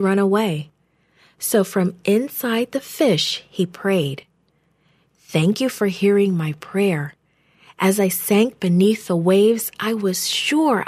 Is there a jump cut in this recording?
no; 0 cuts

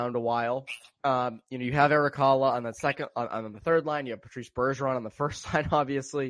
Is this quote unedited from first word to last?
yes; 0 cuts

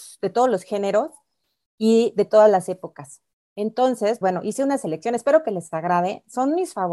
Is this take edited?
yes; 1 cut; at 4.2 s

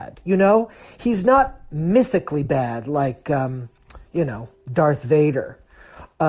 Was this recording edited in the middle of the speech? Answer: no; 0 cuts

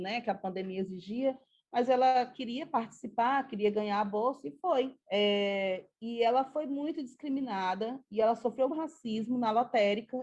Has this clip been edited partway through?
yes; 2 cuts; at 5.0 s, 8.7 s

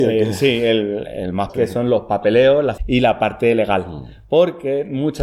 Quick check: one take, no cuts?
no; 2 cuts; at 1.5 s, 2.8 s

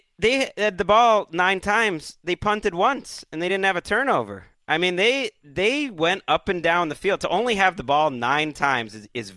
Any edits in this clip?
no; 0 cuts

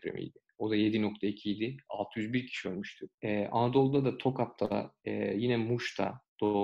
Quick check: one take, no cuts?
no; 1 cut; at 3.1 s

